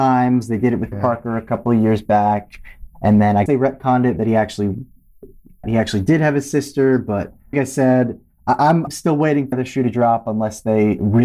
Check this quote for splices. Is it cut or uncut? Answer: cut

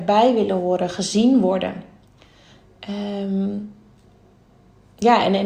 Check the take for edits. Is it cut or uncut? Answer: uncut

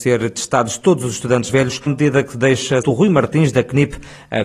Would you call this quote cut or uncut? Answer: cut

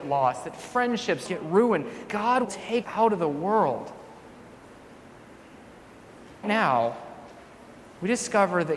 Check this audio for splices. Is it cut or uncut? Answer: cut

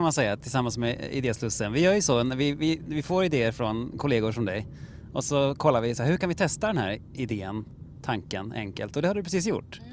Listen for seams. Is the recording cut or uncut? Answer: uncut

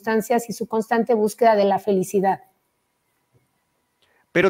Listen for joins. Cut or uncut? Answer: uncut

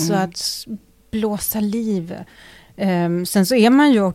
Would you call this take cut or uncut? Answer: uncut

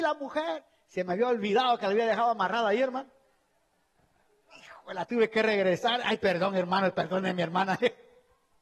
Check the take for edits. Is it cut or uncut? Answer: uncut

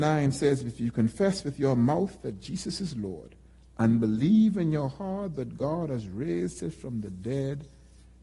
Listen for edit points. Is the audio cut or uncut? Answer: uncut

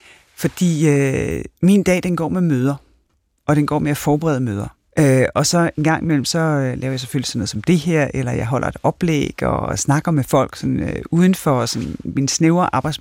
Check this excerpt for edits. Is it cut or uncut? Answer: cut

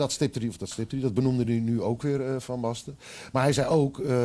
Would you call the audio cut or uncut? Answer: uncut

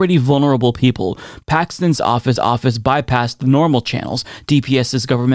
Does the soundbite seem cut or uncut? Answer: cut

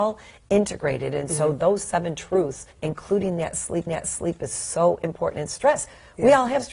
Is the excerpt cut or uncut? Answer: cut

